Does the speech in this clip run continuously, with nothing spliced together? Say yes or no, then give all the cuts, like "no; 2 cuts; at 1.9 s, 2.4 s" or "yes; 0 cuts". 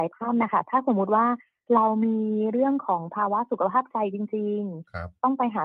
yes; 0 cuts